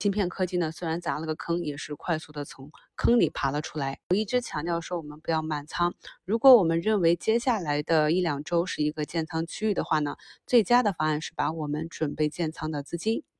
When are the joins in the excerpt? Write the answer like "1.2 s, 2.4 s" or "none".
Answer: 4.0 s